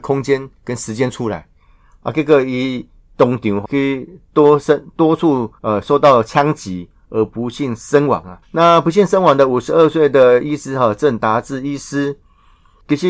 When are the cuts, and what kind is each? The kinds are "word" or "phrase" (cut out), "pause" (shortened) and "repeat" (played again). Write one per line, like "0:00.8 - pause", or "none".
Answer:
0:03.6 - word
0:05.6 - pause
0:08.4 - pause